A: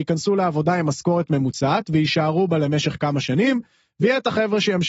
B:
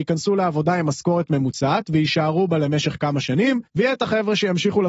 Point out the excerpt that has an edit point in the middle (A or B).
B